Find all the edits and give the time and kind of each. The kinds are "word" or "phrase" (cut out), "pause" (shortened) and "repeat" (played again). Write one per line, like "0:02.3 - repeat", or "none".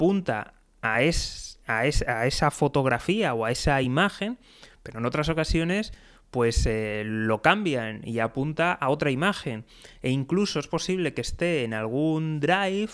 none